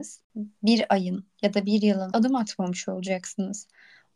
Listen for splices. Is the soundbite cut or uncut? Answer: cut